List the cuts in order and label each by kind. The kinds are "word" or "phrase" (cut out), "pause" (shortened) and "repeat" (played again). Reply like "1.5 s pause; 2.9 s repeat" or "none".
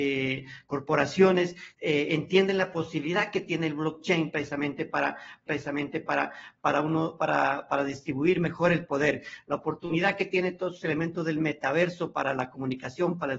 1.7 s pause; 5.5 s repeat